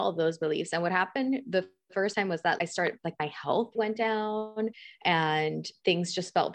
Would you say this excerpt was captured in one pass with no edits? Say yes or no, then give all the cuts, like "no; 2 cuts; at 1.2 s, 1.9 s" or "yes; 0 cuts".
no; 2 cuts; at 2.6 s, 3.7 s